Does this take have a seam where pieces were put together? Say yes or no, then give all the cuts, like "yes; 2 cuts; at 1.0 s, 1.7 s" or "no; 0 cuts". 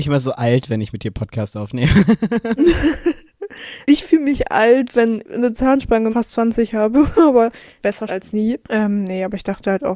yes; 3 cuts; at 5.2 s, 6.1 s, 8.1 s